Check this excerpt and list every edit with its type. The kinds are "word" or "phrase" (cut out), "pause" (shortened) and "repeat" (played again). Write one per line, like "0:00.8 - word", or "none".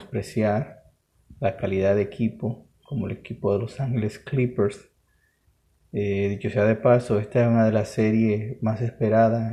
none